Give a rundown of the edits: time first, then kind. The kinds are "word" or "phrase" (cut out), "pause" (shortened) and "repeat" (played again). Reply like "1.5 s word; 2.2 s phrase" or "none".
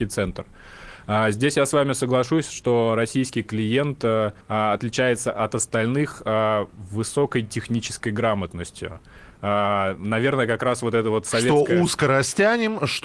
4.4 s pause